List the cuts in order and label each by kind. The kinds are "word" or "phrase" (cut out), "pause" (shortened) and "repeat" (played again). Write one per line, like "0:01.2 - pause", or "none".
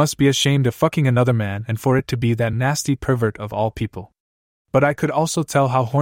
none